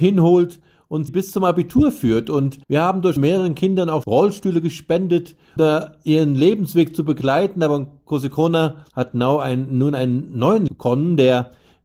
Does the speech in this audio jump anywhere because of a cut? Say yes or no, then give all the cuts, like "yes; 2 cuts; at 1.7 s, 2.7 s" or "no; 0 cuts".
yes; 7 cuts; at 1.1 s, 2.6 s, 3.2 s, 4.0 s, 5.6 s, 8.9 s, 10.7 s